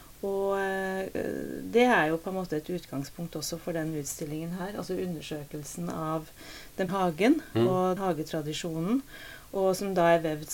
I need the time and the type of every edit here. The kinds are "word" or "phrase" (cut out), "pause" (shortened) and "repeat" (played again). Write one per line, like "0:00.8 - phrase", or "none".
0:06.9 - word
0:08.0 - word

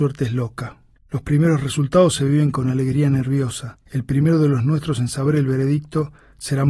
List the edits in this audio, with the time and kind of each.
0:01.0 - pause
0:03.8 - pause

